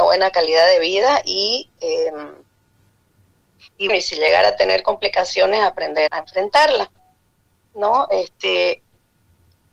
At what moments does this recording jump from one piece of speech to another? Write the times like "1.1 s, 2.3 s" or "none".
3.9 s, 6.1 s